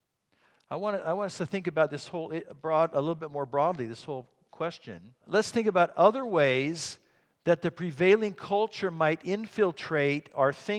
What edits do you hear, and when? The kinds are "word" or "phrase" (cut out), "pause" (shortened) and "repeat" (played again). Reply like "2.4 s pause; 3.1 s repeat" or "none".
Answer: 5.2 s pause

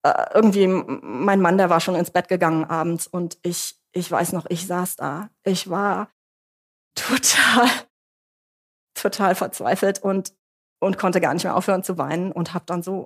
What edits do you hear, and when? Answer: none

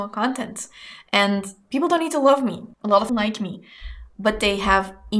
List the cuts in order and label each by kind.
2.7 s pause; 3.1 s phrase

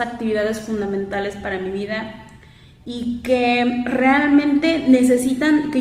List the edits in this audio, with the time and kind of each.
none

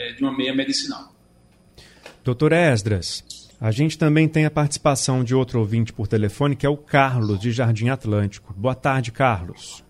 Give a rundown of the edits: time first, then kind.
3.5 s pause

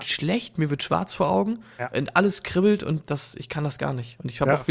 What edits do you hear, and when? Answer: 3.1 s word

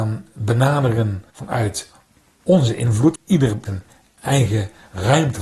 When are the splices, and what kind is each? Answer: 1.3 s pause; 3.2 s word; 3.7 s phrase

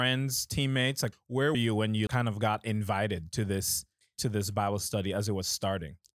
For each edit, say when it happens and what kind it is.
1.1 s word; 1.5 s word; 2.1 s word

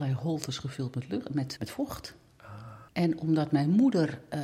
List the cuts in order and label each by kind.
1.6 s word; 2.9 s pause

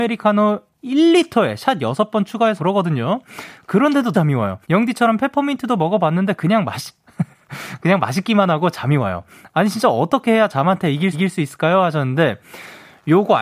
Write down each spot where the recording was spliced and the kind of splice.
2.6 s word; 4.1 s word; 4.6 s pause; 11.1 s repeat

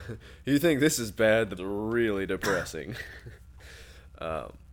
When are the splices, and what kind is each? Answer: 1.6 s phrase

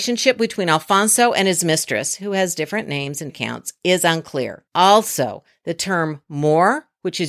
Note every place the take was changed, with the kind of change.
3.3 s word; 4.7 s pause

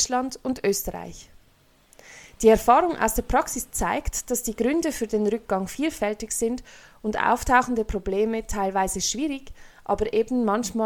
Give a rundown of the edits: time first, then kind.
none

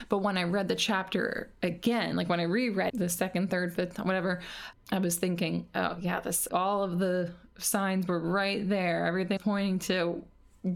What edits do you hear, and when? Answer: 2.9 s word; 3.8 s word; 4.7 s word; 6.5 s word; 9.4 s word

